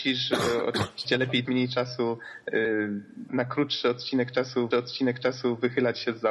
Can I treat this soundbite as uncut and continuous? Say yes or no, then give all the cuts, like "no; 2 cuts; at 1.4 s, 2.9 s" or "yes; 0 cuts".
no; 3 cuts; at 1.4 s, 3.3 s, 4.7 s